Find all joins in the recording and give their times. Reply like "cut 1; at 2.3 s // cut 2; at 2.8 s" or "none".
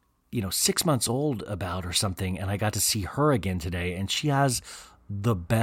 none

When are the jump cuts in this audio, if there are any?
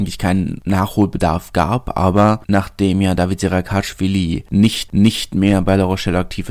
cut 1; at 4.9 s

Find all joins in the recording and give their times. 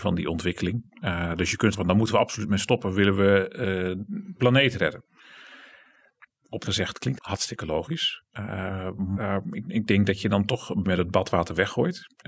cut 1; at 1.7 s // cut 2; at 4.3 s // cut 3; at 6.6 s // cut 4; at 7.2 s // cut 5; at 9.1 s // cut 6; at 10.8 s

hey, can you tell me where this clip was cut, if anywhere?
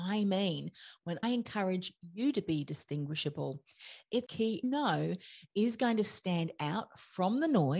cut 1; at 1.2 s // cut 2; at 4.3 s // cut 3; at 4.6 s

